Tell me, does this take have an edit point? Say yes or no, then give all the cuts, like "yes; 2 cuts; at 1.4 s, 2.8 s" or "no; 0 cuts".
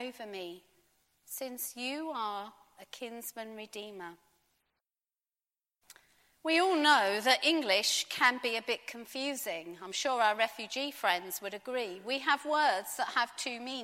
no; 0 cuts